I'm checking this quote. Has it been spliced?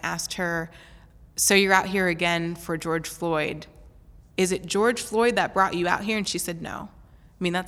yes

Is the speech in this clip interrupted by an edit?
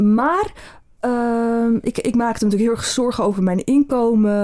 no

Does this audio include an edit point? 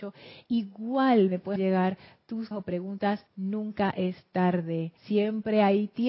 yes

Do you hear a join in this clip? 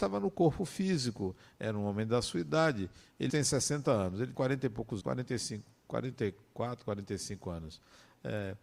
yes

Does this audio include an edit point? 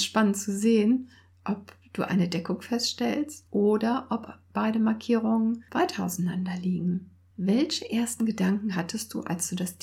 no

